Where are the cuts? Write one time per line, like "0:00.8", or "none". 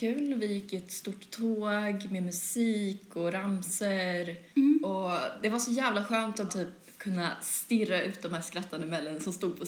0:04.5
0:06.5